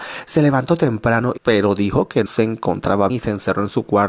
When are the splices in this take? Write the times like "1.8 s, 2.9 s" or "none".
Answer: 1.4 s, 2.3 s, 3.1 s